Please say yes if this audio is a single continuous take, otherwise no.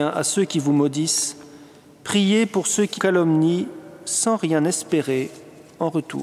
no